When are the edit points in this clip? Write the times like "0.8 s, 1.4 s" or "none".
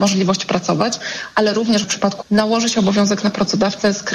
1.8 s, 2.2 s